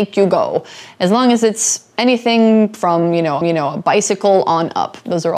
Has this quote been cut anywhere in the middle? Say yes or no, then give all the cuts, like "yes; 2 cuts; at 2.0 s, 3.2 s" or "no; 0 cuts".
yes; 1 cut; at 3.4 s